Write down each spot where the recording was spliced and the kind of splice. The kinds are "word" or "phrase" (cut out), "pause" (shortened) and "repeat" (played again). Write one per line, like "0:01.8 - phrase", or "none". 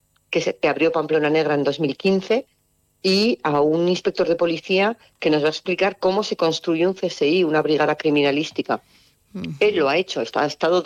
none